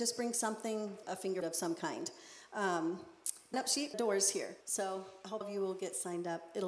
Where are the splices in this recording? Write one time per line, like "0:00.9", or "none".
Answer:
0:01.0
0:01.4
0:03.5
0:03.9
0:04.6
0:05.4